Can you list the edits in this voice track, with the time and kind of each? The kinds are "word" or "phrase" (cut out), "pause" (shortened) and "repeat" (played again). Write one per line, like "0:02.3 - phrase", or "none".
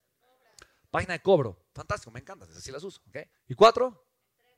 0:03.3 - pause